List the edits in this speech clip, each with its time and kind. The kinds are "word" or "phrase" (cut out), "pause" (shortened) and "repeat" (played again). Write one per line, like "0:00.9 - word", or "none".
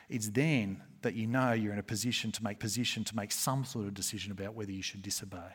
0:02.6 - repeat